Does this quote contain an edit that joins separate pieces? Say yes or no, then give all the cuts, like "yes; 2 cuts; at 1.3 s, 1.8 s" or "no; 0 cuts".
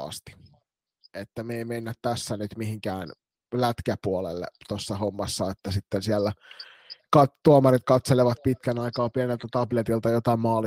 no; 0 cuts